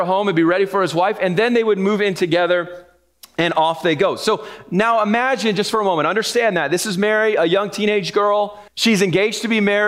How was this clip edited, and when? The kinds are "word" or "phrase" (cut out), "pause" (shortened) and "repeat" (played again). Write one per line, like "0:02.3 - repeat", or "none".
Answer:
0:08.7 - pause